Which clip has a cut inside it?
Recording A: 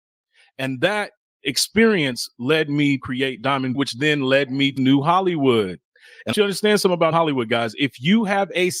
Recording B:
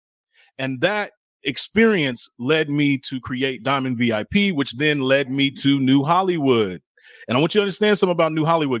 A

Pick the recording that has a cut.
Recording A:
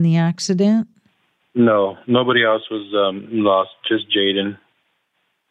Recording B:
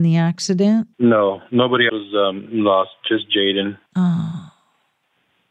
B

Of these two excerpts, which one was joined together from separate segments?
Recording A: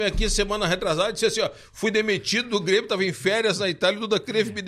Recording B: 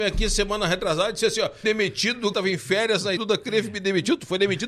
B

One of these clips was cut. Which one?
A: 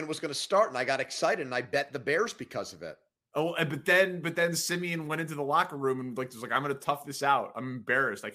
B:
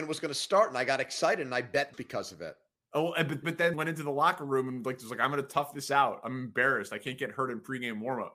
B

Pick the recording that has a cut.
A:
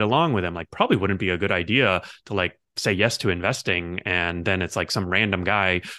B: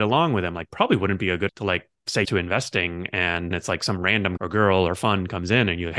B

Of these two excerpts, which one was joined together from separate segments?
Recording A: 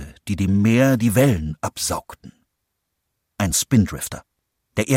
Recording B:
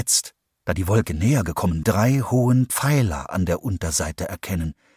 B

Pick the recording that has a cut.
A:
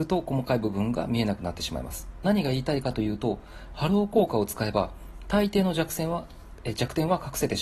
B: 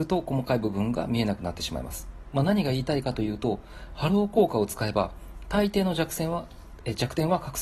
A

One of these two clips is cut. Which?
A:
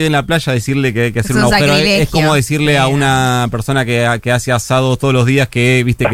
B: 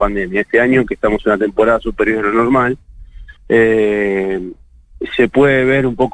B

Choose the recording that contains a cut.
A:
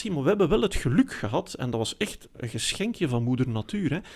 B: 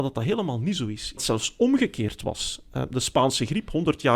B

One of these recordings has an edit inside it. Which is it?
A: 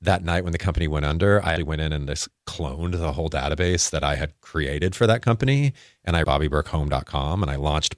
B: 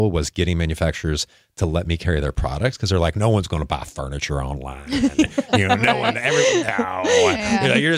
A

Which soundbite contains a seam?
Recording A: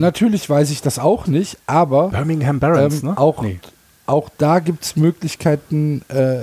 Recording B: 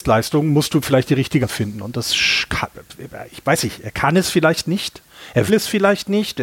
B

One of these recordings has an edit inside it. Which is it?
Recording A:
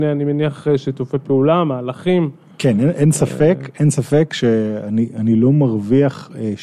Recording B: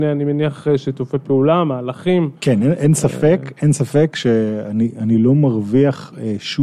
B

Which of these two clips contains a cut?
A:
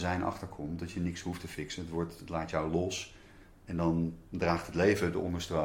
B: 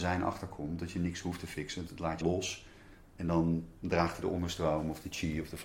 B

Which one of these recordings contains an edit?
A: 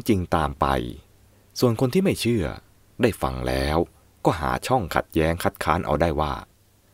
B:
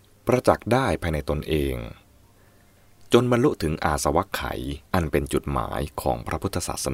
B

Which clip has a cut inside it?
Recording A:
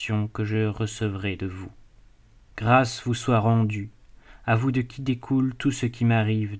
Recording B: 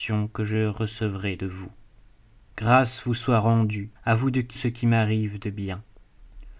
B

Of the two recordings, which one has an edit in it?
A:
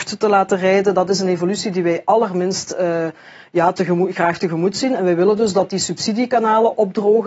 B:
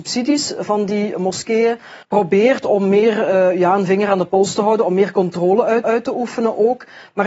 B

